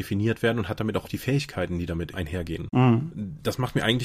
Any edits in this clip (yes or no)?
yes